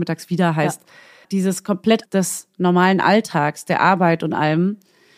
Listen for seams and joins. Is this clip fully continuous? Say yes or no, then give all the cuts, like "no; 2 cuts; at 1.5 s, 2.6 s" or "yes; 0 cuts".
no; 2 cuts; at 1.2 s, 2.0 s